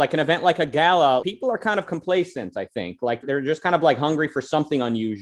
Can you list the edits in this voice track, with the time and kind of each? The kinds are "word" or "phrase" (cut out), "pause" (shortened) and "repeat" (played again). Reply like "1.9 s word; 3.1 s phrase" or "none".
1.2 s word; 3.2 s word